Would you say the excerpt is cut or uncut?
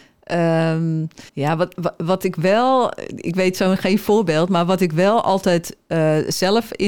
cut